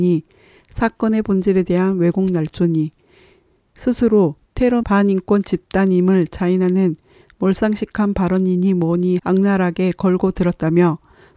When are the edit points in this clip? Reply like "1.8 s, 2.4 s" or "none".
4.8 s, 9.2 s